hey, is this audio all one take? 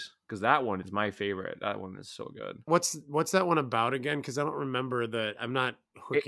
yes; 0 cuts

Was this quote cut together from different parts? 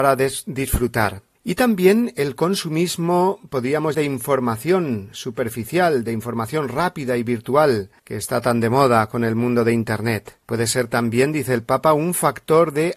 yes; 4 cuts; at 1.3 s, 3.9 s, 8.0 s, 10.4 s

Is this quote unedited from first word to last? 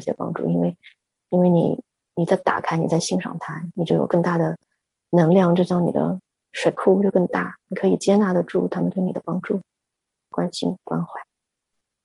no; 1 cut; at 10.8 s

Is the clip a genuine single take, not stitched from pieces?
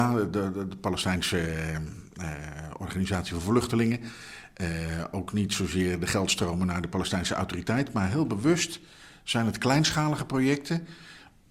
yes; 0 cuts

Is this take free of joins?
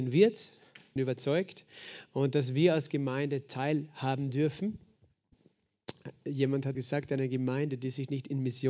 no; 2 cuts; at 1.0 s, 6.7 s

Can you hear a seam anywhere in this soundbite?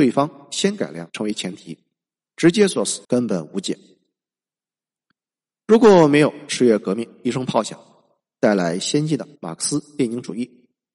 yes; 3 cuts; at 1.1 s, 3.0 s, 9.4 s

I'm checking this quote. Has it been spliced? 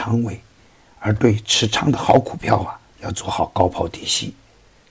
yes; 1 cut; at 2.9 s

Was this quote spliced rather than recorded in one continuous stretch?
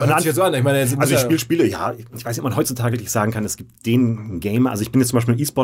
yes; 1 cut; at 2.9 s

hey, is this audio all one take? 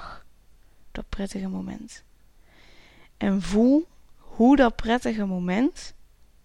yes; 0 cuts

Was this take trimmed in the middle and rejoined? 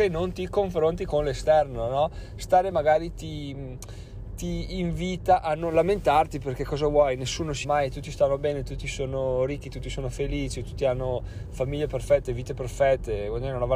yes; 2 cuts; at 2.7 s, 7.6 s

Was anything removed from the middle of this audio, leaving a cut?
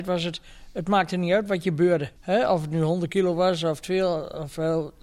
yes; 1 cut; at 2.2 s

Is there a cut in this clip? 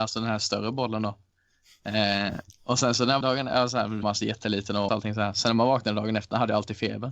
yes; 3 cuts; at 3.2 s, 4.0 s, 4.9 s

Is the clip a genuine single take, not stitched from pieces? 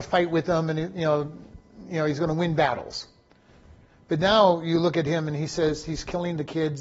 yes; 0 cuts

